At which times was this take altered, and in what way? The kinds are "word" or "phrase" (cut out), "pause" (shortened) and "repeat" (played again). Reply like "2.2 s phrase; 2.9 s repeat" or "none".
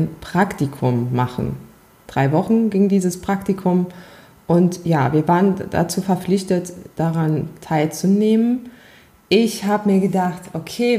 none

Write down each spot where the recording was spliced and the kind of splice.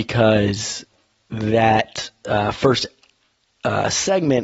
none

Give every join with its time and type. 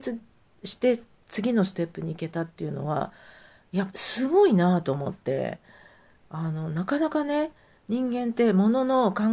none

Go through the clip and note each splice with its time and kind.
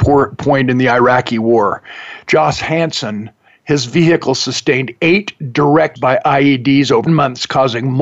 3.5 s pause; 6.0 s word; 7.1 s word

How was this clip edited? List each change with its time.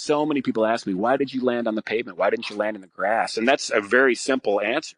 1.2 s word

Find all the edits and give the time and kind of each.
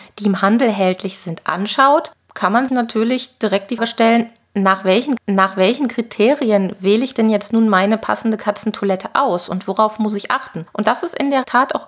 2.7 s word; 3.8 s word; 5.2 s repeat

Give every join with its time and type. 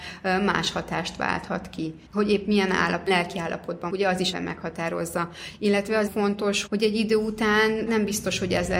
2.1 s pause; 3.1 s word; 3.9 s word; 4.3 s word; 6.1 s phrase; 6.7 s word; 7.9 s word

